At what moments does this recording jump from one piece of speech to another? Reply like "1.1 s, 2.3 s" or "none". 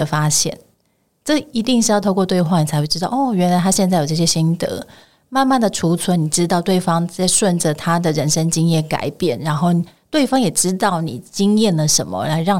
none